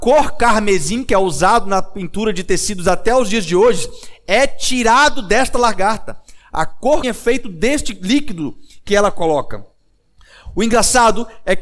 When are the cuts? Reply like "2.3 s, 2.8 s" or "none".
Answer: 7.0 s